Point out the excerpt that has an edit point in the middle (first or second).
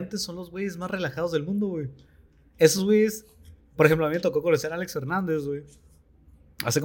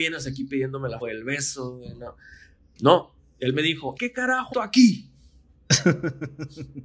second